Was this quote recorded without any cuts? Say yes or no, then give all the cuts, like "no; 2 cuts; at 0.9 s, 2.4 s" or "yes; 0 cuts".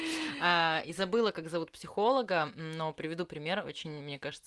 yes; 0 cuts